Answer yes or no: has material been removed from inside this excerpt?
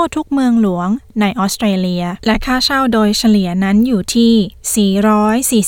yes